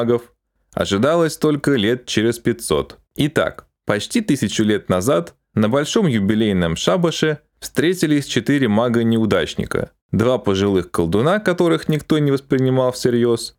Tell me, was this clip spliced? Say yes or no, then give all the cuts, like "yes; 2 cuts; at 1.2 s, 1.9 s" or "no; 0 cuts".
yes; 2 cuts; at 3.1 s, 10.0 s